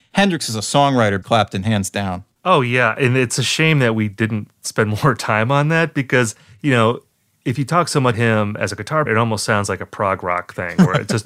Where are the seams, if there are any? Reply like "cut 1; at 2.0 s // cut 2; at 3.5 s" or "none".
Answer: cut 1; at 1.2 s // cut 2; at 8.1 s // cut 3; at 9.1 s